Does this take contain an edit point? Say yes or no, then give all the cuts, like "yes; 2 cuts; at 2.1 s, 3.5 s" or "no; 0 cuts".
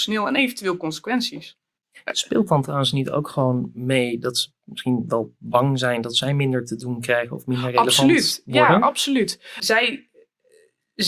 no; 0 cuts